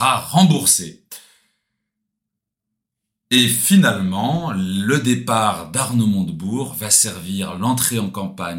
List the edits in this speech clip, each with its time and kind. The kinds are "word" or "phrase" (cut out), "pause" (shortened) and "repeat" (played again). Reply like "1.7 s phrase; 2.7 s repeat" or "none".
none